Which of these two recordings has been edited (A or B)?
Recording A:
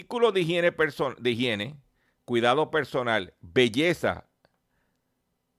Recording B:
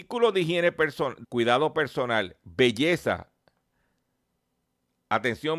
B